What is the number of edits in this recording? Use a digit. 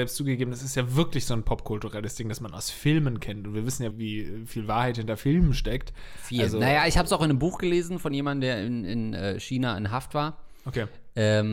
1